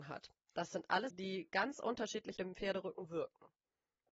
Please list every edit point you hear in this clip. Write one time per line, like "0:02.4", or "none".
0:01.1
0:02.4